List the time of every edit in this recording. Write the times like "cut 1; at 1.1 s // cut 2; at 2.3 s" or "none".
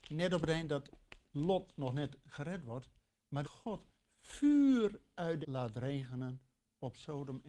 cut 1; at 3.4 s // cut 2; at 5.4 s